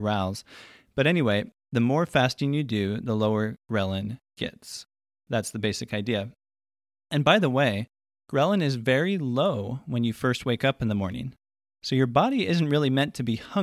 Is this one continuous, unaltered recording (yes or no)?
yes